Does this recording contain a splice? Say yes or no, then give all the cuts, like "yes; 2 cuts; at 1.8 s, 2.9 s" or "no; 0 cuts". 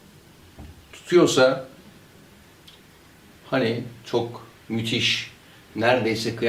no; 0 cuts